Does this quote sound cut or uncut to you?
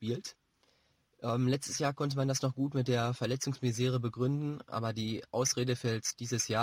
uncut